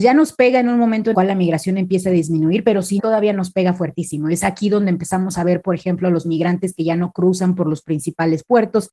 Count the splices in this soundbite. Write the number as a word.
two